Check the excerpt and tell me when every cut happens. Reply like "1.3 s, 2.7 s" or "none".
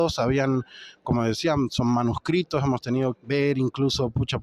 3.1 s